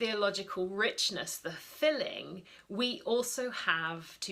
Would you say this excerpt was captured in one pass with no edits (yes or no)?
yes